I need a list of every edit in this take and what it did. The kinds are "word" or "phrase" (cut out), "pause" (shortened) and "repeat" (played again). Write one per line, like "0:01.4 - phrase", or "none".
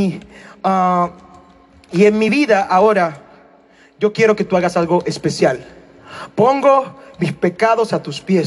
none